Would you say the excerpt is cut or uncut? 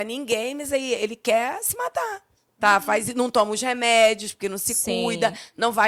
uncut